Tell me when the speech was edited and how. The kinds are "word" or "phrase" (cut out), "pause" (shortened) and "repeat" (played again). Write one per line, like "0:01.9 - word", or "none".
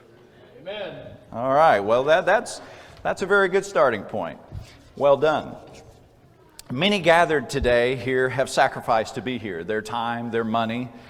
none